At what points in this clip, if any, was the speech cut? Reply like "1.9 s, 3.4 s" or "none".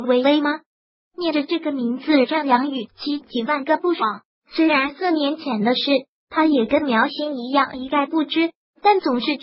none

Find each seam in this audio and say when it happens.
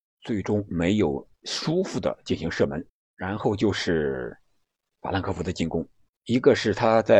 1.4 s, 2.9 s, 6.1 s

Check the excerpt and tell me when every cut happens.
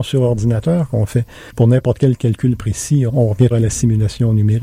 3.1 s, 3.5 s

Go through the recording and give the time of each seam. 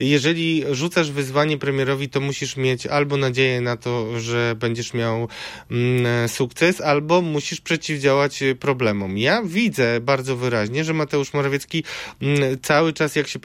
none

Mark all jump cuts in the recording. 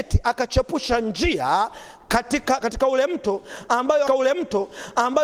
2.6 s, 4.1 s

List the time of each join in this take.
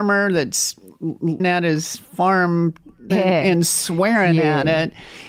1.4 s, 3.1 s

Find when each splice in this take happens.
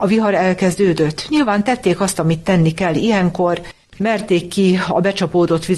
3.8 s

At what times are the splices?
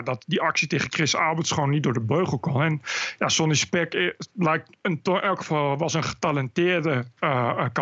none

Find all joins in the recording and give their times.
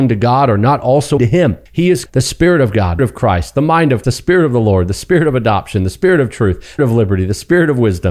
1.2 s, 1.7 s, 2.1 s, 3.0 s, 4.0 s, 6.8 s

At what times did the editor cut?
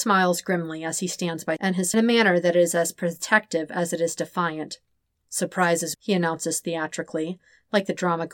1.6 s, 1.9 s, 5.9 s

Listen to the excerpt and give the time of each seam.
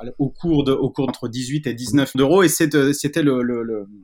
1.1 s, 2.1 s

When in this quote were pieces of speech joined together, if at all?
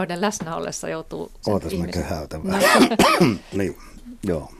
1.4 s, 2.6 s, 3.5 s

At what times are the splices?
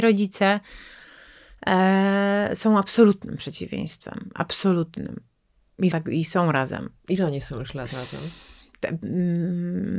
5.9 s

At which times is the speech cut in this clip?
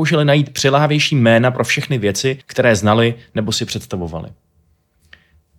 2.4 s

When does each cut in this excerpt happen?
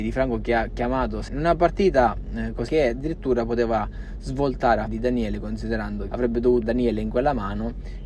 1.3 s, 2.7 s, 4.9 s, 6.1 s, 6.6 s

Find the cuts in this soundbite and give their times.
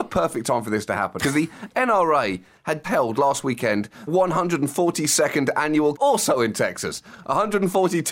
1.2 s, 2.8 s, 4.1 s, 5.9 s

